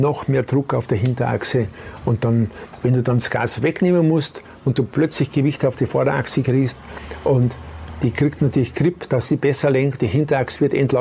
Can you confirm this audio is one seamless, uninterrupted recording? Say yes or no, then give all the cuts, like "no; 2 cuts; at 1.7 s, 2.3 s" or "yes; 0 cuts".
yes; 0 cuts